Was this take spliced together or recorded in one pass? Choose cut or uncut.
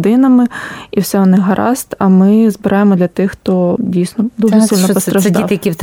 uncut